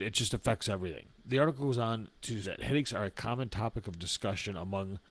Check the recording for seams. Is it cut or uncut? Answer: cut